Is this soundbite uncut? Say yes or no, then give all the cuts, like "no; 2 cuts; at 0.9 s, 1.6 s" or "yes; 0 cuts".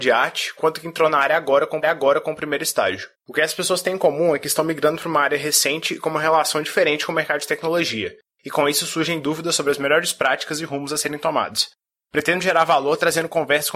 no; 2 cuts; at 1.8 s, 3.1 s